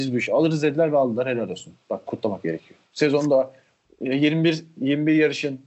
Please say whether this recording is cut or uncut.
cut